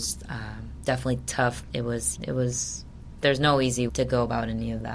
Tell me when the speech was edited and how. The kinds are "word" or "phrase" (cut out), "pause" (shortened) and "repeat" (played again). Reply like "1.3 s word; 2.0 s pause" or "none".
1.7 s word; 2.2 s word; 3.2 s word; 3.9 s word